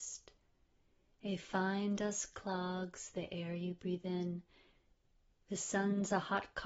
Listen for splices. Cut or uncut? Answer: uncut